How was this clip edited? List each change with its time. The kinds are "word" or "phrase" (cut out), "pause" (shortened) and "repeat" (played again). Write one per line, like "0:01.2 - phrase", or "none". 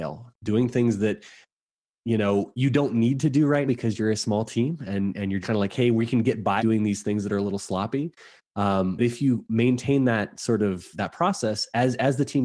0:03.7 - word
0:05.4 - word
0:06.6 - word
0:09.0 - word
0:10.9 - word